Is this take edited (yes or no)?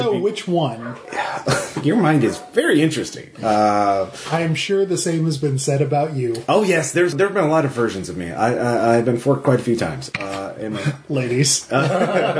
yes